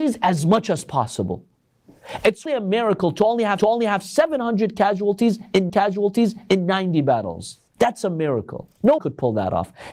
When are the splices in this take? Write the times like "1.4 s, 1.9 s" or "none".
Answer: 2.5 s, 3.6 s, 5.7 s, 7.7 s, 9.0 s